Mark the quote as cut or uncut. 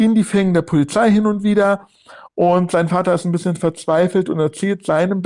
uncut